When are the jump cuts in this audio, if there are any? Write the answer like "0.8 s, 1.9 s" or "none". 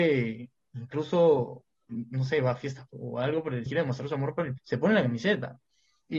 1.9 s, 2.9 s, 3.7 s, 4.6 s